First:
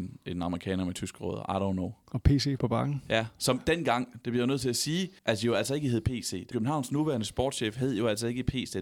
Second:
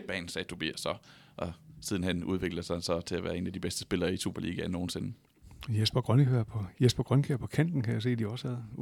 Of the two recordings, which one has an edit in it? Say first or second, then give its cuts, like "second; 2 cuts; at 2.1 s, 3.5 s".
first; 3 cuts; at 2.6 s, 5.2 s, 6.5 s